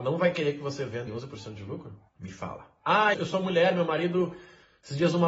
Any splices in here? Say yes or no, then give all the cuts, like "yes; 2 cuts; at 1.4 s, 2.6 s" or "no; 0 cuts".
yes; 3 cuts; at 1.1 s, 2.1 s, 3.1 s